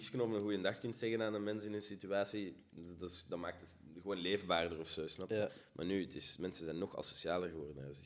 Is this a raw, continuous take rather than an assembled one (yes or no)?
yes